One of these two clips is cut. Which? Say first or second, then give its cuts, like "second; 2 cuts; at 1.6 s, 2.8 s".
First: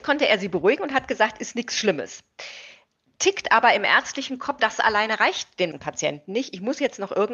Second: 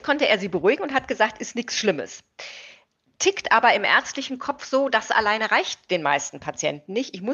first; 2 cuts; at 4.6 s, 5.7 s